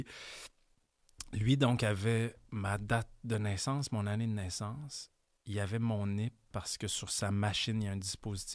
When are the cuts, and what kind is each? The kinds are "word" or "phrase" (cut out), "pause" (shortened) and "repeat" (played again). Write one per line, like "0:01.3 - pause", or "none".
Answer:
none